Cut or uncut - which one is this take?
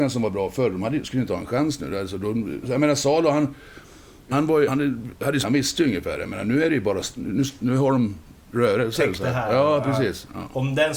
cut